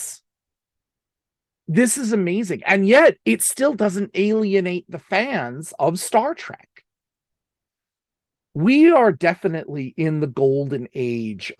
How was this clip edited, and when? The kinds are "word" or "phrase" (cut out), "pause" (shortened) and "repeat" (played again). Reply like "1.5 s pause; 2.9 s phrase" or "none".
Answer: 3.2 s pause

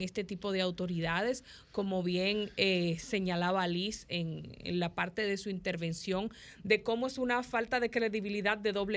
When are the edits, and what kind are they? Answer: none

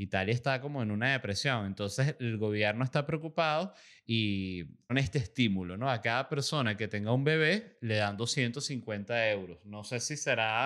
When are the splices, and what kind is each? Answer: 4.9 s word

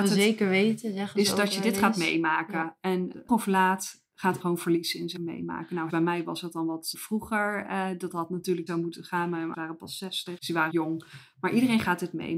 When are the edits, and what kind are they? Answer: 3.3 s word; 4.4 s word; 5.2 s word; 5.9 s word; 6.9 s word; 8.7 s word; 9.5 s word; 10.4 s word; 10.7 s word

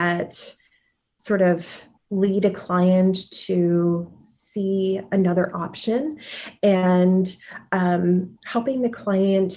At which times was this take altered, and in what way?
2.0 s pause; 8.4 s pause

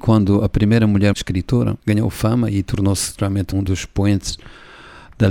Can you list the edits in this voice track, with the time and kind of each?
1.1 s word; 1.8 s pause; 3.5 s word

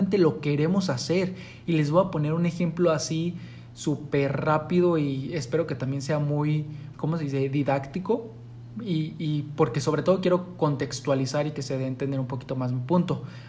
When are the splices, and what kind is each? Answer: 6.9 s word

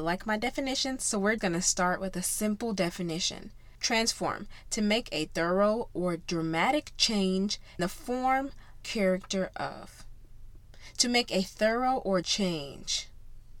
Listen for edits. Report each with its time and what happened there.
1.4 s word; 7.8 s word; 8.8 s phrase; 12.2 s word

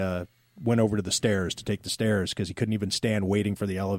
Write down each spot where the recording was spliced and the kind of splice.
none

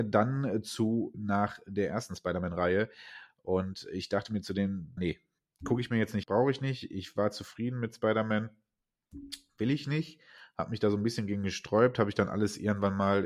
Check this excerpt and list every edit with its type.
1.1 s word; 5.0 s phrase; 6.2 s word

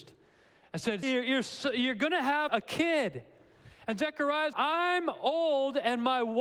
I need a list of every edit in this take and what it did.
1.0 s word; 2.5 s word; 4.5 s word

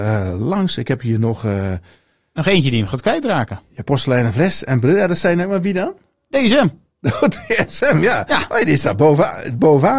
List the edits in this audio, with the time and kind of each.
none

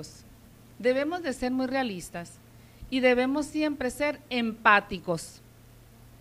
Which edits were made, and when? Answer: none

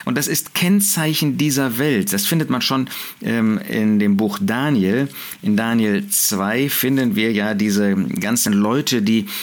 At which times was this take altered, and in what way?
none

